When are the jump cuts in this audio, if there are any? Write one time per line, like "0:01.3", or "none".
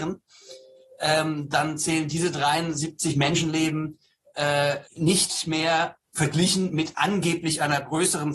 0:04.9
0:06.0